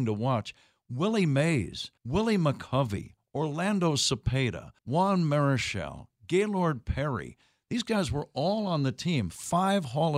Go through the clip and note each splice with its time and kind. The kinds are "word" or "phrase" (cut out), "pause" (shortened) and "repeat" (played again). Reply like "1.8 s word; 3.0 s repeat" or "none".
2.0 s pause; 4.8 s pause